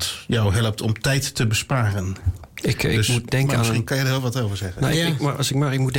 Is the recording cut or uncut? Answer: uncut